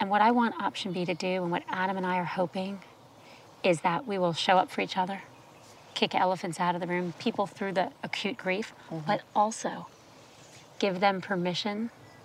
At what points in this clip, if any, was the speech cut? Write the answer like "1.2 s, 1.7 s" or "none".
7.1 s